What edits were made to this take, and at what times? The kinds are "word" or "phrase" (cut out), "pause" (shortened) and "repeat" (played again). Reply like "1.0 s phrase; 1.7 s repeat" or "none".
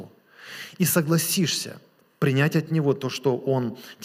none